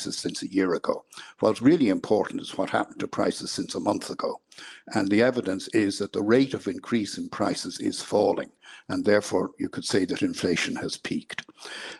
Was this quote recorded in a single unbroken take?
yes; 0 cuts

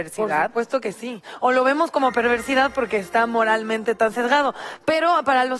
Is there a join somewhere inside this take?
no; 0 cuts

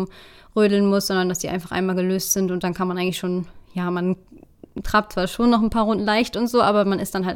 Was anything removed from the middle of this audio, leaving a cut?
no; 0 cuts

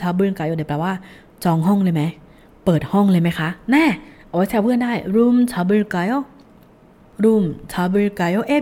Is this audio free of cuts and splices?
yes; 0 cuts

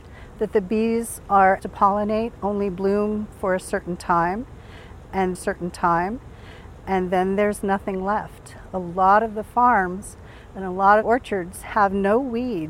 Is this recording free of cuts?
no; 3 cuts; at 1.6 s, 5.3 s, 11.0 s

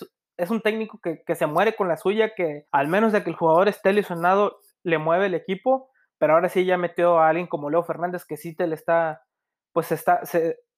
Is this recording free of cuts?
no; 1 cut; at 2.7 s

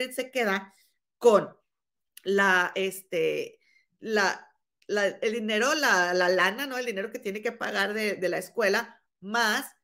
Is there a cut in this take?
no; 0 cuts

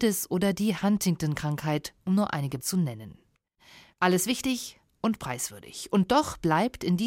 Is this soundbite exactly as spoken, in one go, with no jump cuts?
no; 1 cut; at 2.6 s

